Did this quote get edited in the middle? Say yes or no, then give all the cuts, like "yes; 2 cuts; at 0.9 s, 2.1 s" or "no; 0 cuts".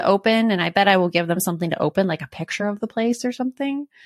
no; 0 cuts